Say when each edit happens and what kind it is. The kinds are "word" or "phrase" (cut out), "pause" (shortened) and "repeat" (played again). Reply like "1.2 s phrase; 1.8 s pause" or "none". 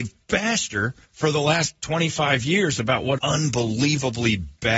1.0 s pause; 3.2 s word